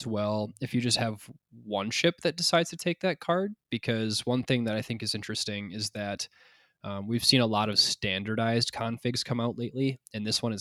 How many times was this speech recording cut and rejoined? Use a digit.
0